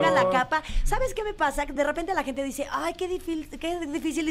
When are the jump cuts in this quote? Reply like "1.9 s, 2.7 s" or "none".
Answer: none